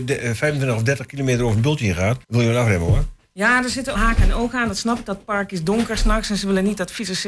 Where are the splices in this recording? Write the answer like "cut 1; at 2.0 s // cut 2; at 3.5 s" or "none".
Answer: cut 1; at 2.2 s // cut 2; at 3.9 s